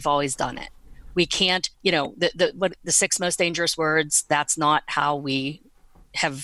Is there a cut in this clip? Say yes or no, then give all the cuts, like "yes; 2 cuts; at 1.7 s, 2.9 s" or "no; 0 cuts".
yes; 1 cut; at 1.7 s